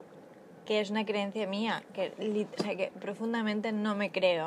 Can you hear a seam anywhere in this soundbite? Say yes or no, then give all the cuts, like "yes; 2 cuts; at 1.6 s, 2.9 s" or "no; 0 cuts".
no; 0 cuts